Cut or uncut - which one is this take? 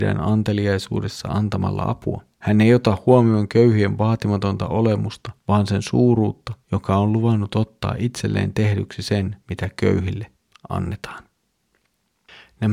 cut